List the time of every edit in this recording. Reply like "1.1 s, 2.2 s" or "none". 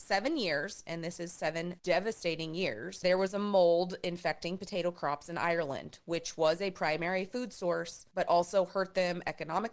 none

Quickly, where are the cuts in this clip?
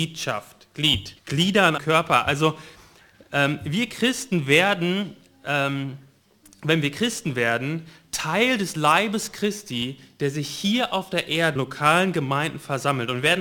1.2 s, 1.8 s, 11.6 s

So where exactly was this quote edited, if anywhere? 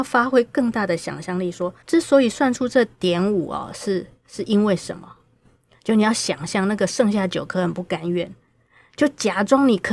1.8 s

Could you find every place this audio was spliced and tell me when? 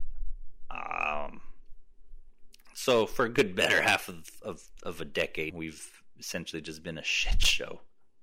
5.5 s

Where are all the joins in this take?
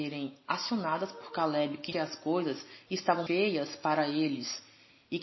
1.9 s, 3.3 s

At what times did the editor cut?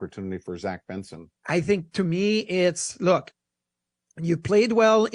1.4 s

